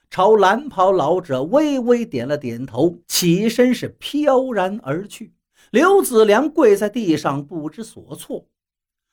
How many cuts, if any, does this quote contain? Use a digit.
2